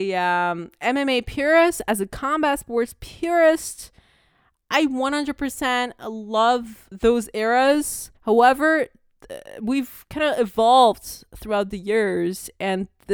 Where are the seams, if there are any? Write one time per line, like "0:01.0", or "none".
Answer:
0:06.9
0:08.2